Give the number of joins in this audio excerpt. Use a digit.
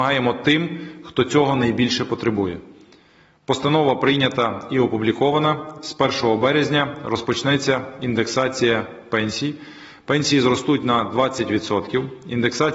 0